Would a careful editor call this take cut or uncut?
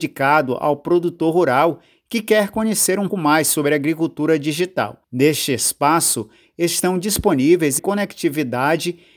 cut